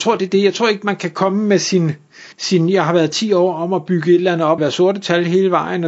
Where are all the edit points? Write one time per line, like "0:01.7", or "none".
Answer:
0:02.3
0:04.6

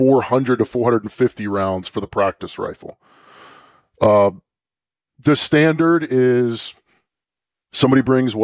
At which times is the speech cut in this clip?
none

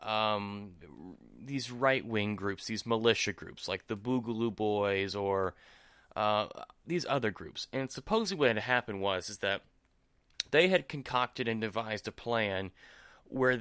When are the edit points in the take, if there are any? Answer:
none

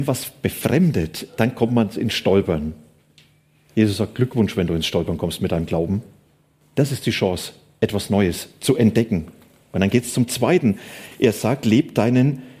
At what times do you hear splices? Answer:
none

